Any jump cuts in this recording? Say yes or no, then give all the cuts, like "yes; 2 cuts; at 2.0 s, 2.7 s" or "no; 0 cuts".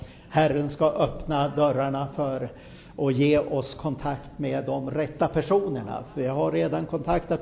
no; 0 cuts